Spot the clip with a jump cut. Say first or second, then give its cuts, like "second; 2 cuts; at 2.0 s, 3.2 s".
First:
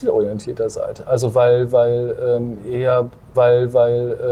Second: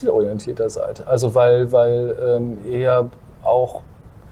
first; 1 cut; at 3.3 s